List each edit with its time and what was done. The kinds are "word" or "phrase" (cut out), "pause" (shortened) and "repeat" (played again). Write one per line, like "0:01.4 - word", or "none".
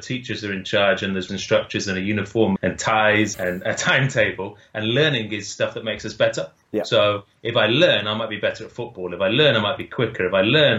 0:01.3 - word
0:02.6 - word
0:03.3 - word